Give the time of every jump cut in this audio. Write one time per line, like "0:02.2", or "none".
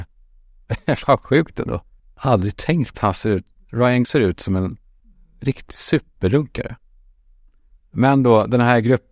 0:02.0
0:02.9
0:04.0
0:05.0